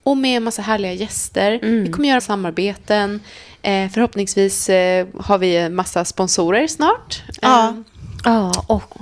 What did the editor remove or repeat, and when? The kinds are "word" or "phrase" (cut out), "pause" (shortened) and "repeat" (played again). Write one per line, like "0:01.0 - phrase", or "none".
0:02.2 - phrase